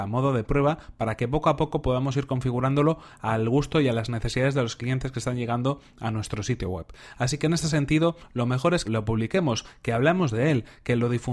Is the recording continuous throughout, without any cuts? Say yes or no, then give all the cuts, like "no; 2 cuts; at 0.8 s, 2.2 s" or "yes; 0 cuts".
no; 1 cut; at 8.8 s